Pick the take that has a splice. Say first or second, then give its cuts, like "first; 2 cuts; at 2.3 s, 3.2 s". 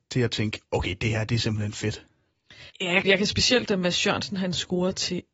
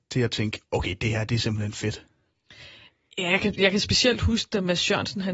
first; 3 cuts; at 2.7 s, 3.0 s, 3.7 s